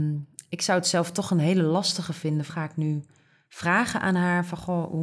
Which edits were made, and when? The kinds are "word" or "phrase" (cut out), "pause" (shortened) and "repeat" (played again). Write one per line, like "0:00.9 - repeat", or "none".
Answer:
0:02.5 - word